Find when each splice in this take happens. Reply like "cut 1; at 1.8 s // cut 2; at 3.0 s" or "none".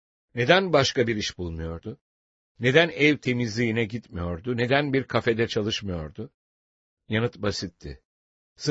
none